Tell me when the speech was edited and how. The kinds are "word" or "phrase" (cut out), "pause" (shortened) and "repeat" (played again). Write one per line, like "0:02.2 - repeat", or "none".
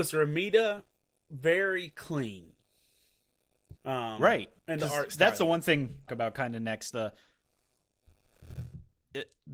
0:03.8 - pause
0:04.6 - pause
0:06.1 - phrase
0:06.9 - word